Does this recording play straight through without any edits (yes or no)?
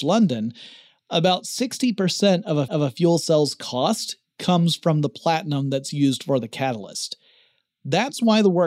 no